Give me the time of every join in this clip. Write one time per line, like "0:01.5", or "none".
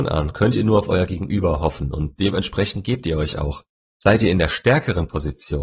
none